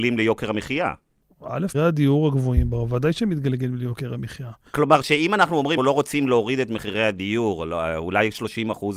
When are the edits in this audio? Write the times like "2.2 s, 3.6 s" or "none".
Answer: 1.7 s, 5.8 s